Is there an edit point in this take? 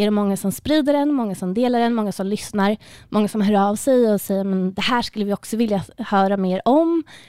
no; 0 cuts

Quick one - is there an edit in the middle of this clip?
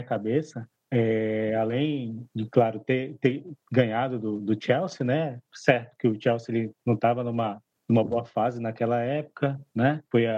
no; 0 cuts

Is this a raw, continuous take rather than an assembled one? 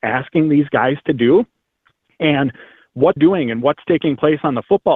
no; 1 cut; at 3.2 s

